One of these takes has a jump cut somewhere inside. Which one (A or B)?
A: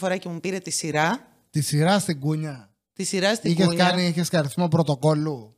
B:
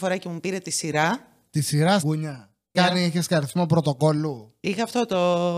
B